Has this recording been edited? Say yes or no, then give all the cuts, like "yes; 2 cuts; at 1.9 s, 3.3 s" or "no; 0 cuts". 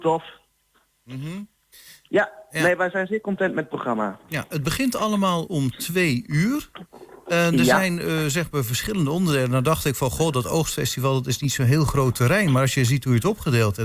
no; 0 cuts